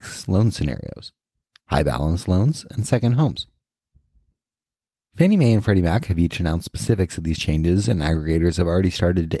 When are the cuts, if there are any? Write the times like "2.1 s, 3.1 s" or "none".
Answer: none